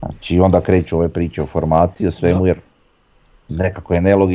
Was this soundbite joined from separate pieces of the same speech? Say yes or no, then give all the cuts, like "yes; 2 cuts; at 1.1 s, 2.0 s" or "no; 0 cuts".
no; 0 cuts